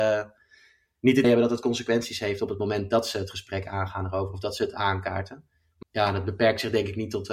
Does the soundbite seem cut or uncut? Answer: cut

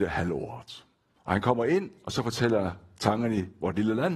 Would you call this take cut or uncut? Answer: uncut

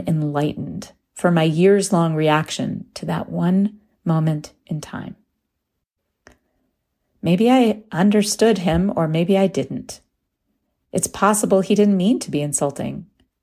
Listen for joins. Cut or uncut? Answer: uncut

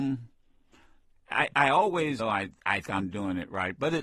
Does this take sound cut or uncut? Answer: cut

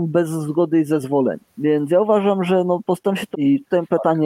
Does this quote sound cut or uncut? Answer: cut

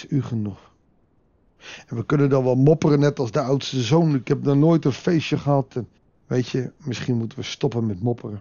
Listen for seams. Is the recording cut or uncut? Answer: cut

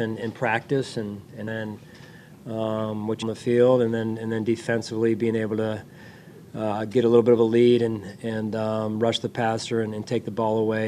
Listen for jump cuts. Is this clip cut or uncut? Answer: cut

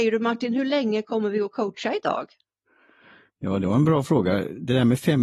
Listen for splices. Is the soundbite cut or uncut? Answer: uncut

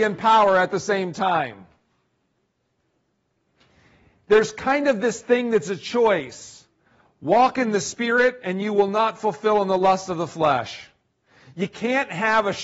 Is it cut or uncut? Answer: uncut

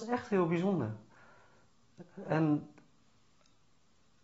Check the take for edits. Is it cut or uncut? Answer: uncut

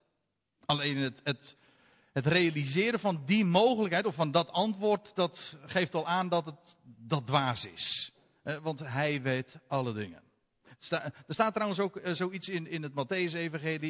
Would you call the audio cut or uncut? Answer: uncut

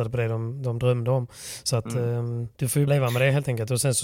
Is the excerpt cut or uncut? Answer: cut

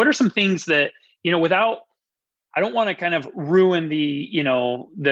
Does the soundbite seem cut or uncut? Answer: uncut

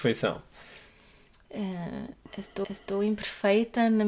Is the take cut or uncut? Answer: cut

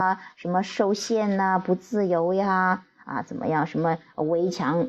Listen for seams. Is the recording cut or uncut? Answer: uncut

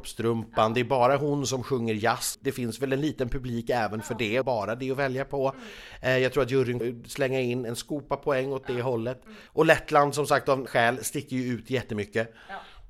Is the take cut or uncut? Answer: cut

